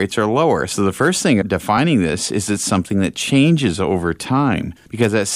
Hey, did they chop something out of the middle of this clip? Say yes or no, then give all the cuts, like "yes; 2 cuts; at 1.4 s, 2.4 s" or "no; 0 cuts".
yes; 1 cut; at 1.4 s